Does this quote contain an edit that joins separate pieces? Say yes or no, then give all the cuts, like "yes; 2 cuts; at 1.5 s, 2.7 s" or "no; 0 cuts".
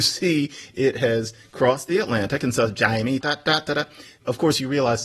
yes; 1 cut; at 3.2 s